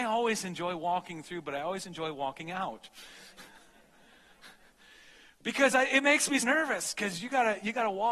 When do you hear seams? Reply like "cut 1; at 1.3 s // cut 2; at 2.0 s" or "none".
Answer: cut 1; at 6.4 s